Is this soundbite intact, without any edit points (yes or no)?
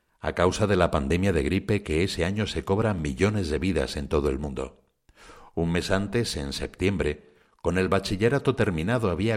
yes